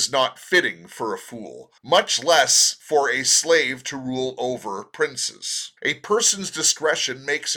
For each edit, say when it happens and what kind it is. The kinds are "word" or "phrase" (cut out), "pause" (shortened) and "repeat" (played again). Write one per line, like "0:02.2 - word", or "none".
0:01.8 - pause
0:05.8 - pause